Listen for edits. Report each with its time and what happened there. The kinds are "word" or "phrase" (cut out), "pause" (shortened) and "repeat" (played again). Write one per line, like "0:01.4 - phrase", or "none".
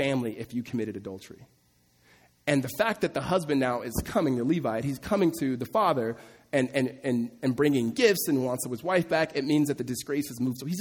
none